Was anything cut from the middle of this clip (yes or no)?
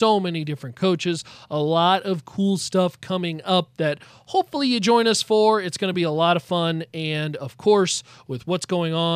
no